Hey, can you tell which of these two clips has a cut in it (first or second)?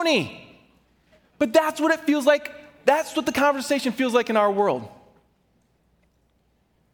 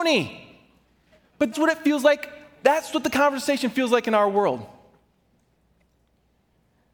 second